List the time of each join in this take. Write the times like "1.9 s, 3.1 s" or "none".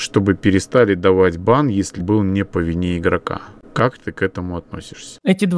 2.0 s